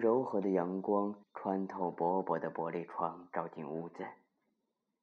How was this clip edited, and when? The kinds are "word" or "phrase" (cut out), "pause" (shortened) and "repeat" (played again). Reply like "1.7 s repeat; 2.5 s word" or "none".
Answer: 1.2 s pause